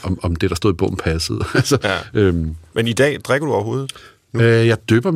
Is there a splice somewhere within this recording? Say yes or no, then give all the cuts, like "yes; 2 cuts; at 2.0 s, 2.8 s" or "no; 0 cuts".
no; 0 cuts